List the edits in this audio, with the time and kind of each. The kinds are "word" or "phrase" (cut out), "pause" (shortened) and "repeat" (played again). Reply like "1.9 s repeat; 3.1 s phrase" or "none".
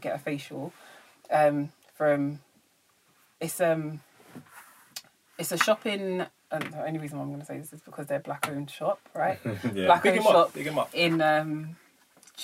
none